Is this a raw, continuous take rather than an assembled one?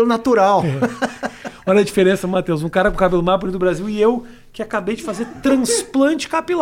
yes; 0 cuts

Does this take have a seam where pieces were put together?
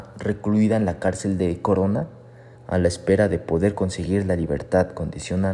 yes; 1 cut; at 2.5 s

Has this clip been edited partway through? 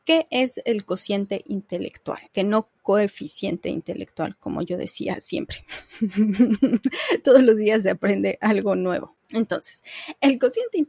yes; 1 cut; at 2.3 s

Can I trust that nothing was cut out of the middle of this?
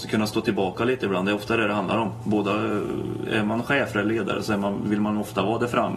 yes; 0 cuts

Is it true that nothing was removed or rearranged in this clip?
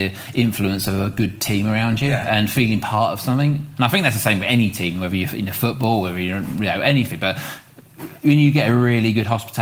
yes; 0 cuts

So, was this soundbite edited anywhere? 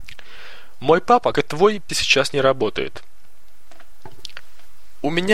yes; 2 cuts; at 1.3 s, 1.9 s

